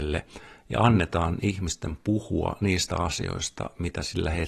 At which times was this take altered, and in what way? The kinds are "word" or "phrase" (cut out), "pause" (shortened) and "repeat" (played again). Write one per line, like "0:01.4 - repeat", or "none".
none